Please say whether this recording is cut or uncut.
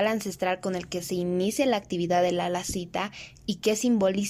uncut